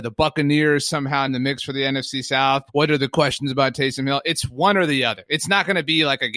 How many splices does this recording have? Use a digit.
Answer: 2